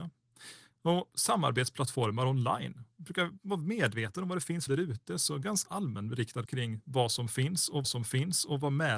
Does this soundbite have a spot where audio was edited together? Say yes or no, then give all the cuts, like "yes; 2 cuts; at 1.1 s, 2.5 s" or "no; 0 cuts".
yes; 4 cuts; at 4.7 s, 5.6 s, 6.4 s, 7.8 s